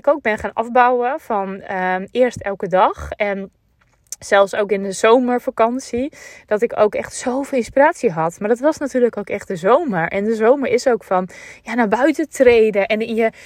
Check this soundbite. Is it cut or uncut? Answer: uncut